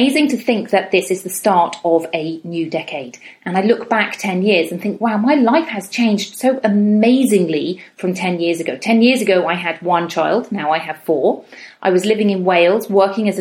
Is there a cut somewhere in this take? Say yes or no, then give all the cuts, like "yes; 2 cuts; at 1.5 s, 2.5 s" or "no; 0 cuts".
no; 0 cuts